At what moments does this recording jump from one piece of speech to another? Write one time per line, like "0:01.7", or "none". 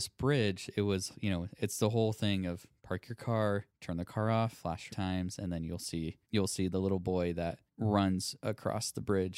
0:03.7
0:04.9
0:06.2
0:07.7